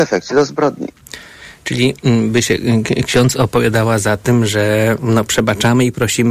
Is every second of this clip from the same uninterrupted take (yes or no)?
yes